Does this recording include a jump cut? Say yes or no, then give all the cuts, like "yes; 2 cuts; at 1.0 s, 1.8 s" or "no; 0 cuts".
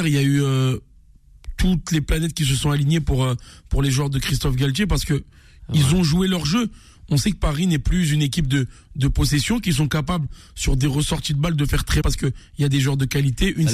yes; 1 cut; at 12.0 s